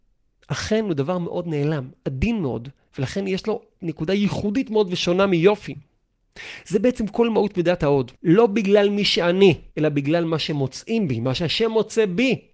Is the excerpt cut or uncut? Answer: cut